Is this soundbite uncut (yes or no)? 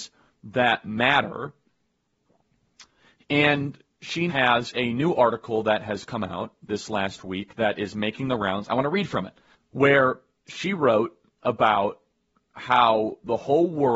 no